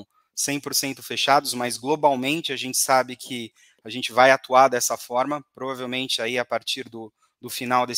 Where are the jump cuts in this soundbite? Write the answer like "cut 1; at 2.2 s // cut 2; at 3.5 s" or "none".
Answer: none